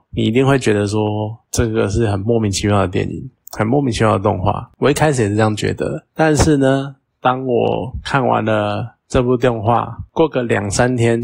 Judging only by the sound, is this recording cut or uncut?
uncut